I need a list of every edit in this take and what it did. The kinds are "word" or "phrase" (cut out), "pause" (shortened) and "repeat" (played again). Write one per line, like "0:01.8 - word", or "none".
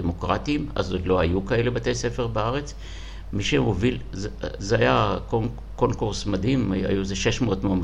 none